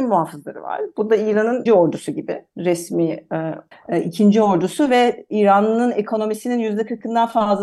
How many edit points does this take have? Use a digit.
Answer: 2